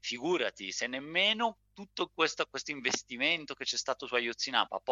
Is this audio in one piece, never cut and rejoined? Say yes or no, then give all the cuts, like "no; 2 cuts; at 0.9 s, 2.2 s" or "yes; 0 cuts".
yes; 0 cuts